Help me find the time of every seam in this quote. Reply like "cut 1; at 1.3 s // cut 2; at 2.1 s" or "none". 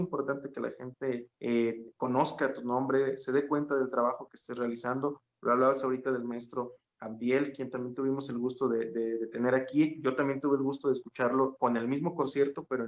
cut 1; at 1.3 s